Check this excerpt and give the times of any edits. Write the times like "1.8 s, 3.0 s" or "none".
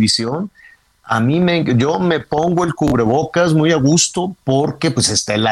none